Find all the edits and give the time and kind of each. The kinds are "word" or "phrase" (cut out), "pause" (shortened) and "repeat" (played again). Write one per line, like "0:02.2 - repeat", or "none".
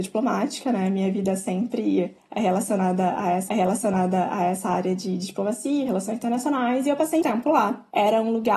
0:03.5 - repeat
0:07.2 - word